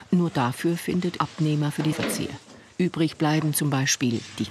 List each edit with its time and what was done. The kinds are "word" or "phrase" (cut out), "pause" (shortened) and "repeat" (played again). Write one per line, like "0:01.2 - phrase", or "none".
0:01.2 - word
0:01.9 - word